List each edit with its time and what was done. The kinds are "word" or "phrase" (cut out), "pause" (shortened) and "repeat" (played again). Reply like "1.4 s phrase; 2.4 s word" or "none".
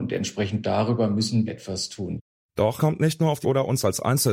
1.5 s word; 2.8 s word; 3.4 s word